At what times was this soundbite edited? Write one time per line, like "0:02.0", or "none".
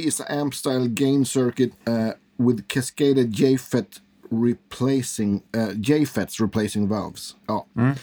0:01.8
0:05.5